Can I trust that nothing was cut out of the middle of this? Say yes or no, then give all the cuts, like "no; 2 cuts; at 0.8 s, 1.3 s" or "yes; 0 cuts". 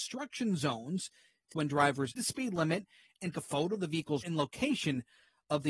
no; 4 cuts; at 1.5 s, 2.2 s, 3.3 s, 4.2 s